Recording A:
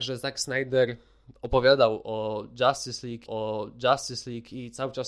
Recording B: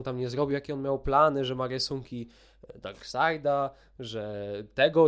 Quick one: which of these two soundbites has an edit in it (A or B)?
A